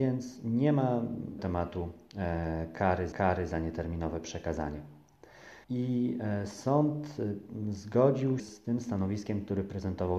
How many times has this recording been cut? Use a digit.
4